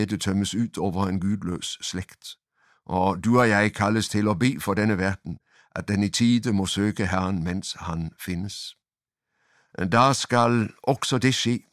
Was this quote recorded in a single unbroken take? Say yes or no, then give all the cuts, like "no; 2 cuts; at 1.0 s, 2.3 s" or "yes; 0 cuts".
yes; 0 cuts